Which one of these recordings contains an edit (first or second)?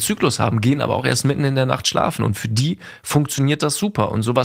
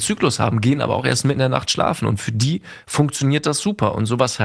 second